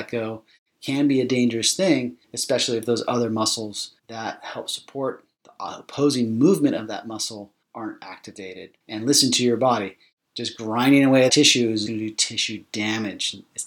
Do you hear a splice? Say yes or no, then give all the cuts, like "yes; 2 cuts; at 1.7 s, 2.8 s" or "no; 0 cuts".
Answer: yes; 6 cuts; at 2.2 s, 4.0 s, 7.6 s, 8.8 s, 11.3 s, 11.9 s